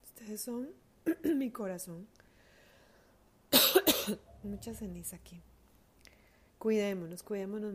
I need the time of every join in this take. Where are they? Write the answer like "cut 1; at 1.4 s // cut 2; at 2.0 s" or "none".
cut 1; at 6.5 s